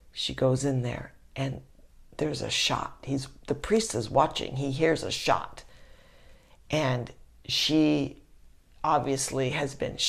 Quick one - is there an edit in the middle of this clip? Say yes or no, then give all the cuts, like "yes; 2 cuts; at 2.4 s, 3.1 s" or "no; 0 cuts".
no; 0 cuts